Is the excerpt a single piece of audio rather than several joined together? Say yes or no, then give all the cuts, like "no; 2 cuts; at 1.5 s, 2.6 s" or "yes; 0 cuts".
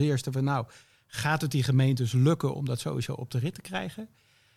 yes; 0 cuts